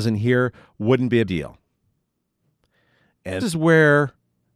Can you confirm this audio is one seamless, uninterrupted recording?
no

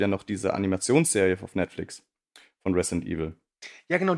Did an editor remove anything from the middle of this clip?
no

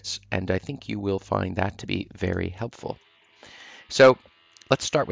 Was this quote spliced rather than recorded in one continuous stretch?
no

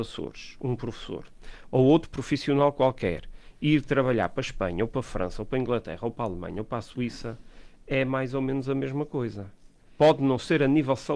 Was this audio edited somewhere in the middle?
no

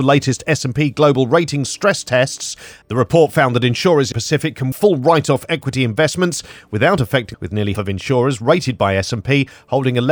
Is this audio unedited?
no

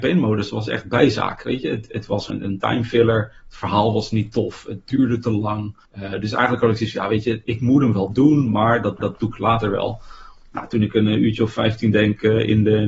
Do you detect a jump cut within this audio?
yes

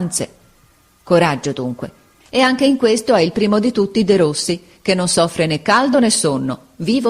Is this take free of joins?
yes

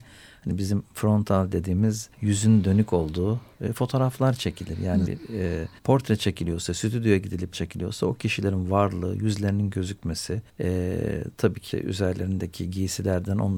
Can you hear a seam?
yes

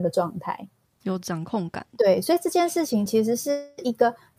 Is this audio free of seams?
yes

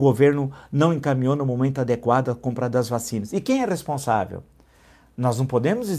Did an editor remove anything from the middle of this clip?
no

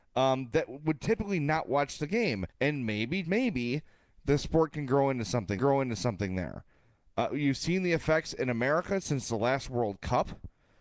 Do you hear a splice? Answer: yes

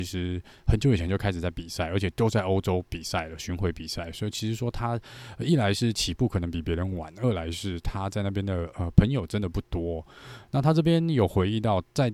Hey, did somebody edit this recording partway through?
no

